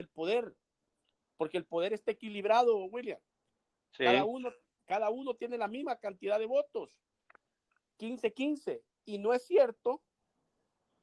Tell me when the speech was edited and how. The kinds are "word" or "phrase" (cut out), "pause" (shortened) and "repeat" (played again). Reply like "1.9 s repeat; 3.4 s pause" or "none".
none